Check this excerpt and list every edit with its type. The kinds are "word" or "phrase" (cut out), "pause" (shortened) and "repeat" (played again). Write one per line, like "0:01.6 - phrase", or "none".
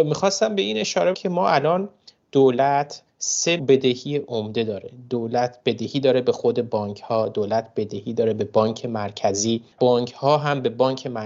0:01.1 - word
0:03.6 - word
0:09.8 - word